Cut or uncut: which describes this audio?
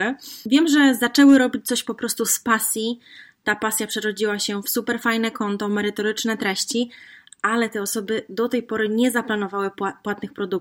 uncut